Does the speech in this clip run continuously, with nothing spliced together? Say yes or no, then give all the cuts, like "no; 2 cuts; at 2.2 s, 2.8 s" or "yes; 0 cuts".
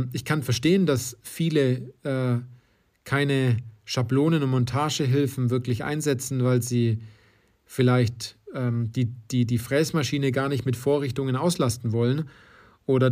yes; 0 cuts